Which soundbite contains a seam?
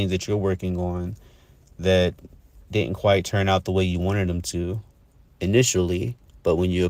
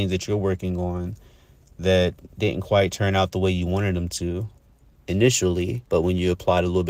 second; 2 cuts; at 2.3 s, 5.9 s

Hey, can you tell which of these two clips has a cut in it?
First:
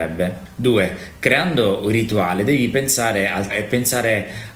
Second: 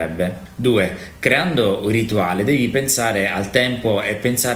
first; 1 cut; at 3.5 s

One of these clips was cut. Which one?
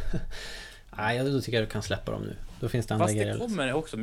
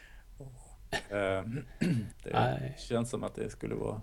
second; 1 cut; at 2.1 s

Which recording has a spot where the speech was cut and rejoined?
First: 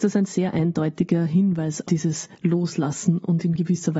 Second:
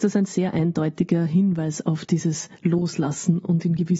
first; 1 cut; at 1.8 s

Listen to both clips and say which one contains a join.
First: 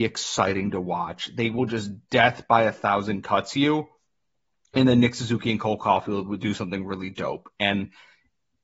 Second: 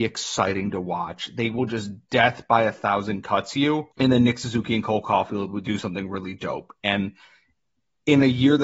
second; 1 cut; at 3.9 s

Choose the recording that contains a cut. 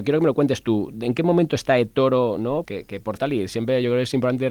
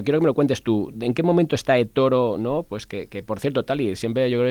first; 2 cuts; at 2.6 s, 3.2 s

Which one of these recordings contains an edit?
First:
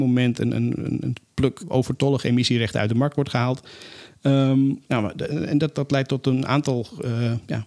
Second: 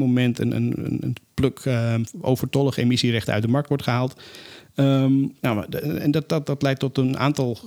first; 2 cuts; at 1.6 s, 5.7 s

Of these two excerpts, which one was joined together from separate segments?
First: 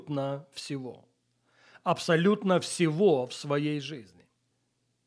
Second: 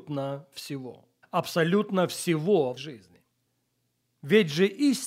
second; 2 cuts; at 1.2 s, 2.8 s

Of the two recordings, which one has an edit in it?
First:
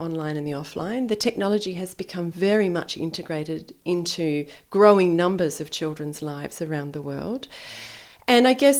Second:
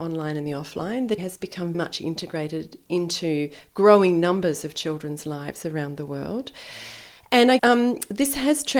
second; 3 cuts; at 1.2 s, 1.7 s, 7.6 s

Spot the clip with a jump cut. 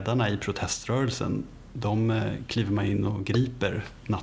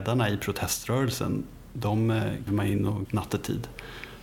second; 2 cuts; at 2.5 s, 3.0 s

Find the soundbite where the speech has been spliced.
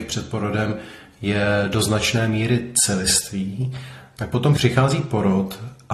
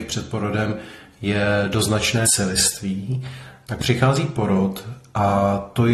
second; 2 cuts; at 2.3 s, 3.8 s

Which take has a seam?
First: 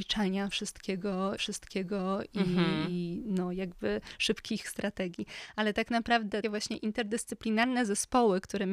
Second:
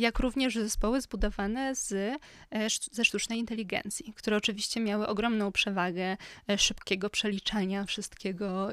first; 3 cuts; at 1.4 s, 4.6 s, 6.4 s

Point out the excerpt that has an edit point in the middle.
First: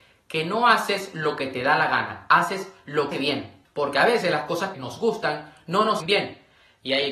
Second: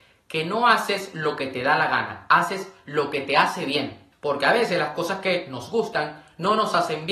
first; 3 cuts; at 3.1 s, 4.7 s, 6.0 s

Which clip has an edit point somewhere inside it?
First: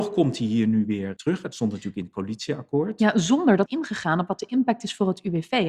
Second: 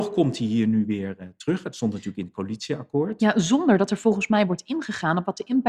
first; 2 cuts; at 1.2 s, 3.7 s

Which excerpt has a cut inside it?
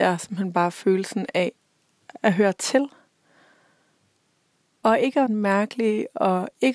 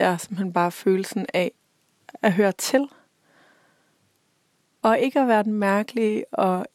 first; 1 cut; at 5.3 s

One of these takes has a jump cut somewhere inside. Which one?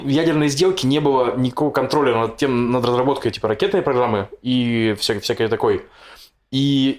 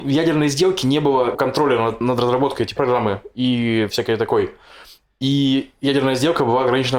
second; 4 cuts; at 1.3 s, 2.0 s, 2.8 s, 3.9 s

